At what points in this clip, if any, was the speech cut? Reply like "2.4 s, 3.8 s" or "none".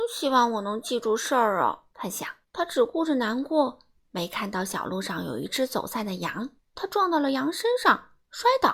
1.9 s, 2.4 s, 6.6 s